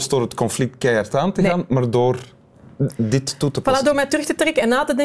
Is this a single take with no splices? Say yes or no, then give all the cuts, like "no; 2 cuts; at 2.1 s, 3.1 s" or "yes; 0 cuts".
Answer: yes; 0 cuts